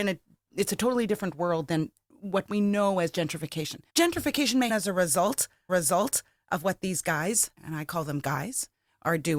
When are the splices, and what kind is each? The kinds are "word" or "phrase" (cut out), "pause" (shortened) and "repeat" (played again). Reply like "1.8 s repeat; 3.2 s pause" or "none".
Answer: 3.9 s pause; 4.7 s word; 5.7 s repeat; 7.6 s pause